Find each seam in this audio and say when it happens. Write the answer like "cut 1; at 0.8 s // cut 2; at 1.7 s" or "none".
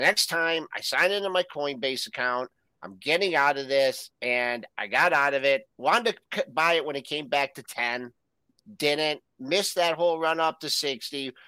cut 1; at 4.1 s // cut 2; at 5.7 s